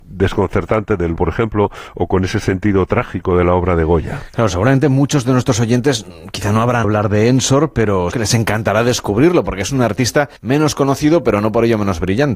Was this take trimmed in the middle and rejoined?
yes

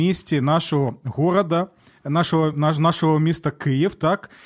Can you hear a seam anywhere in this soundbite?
no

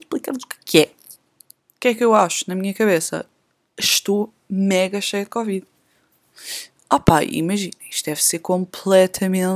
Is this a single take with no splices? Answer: yes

